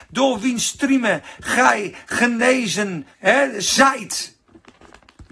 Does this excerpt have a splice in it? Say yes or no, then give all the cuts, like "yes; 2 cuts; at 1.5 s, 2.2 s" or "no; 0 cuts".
yes; 1 cut; at 3.1 s